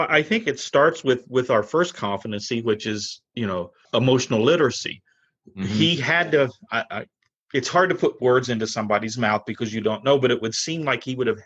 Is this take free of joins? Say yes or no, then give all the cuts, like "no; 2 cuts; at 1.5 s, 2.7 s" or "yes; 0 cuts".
no; 1 cut; at 3.8 s